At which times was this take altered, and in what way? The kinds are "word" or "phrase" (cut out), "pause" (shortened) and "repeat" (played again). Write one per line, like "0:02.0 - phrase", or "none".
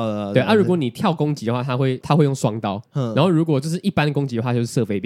0:02.9 - pause